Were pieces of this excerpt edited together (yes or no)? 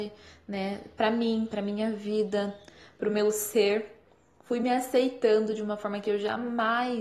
no